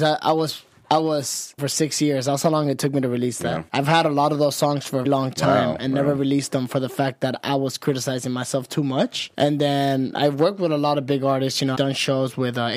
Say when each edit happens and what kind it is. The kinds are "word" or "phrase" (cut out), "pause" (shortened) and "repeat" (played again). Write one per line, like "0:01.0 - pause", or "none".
0:01.6 - phrase
0:03.7 - pause
0:05.0 - word
0:09.3 - pause
0:11.7 - word